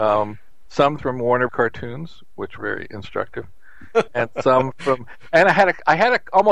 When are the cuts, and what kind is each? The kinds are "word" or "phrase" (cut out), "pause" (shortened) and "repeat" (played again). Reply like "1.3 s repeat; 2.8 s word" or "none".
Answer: 1.0 s word; 1.5 s word; 2.6 s word; 4.1 s word